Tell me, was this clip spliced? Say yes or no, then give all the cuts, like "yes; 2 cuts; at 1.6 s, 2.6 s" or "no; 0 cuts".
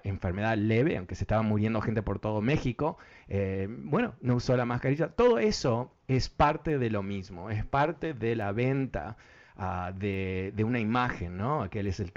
no; 0 cuts